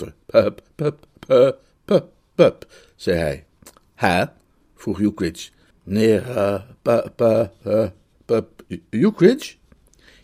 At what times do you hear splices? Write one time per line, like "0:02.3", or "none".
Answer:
0:05.7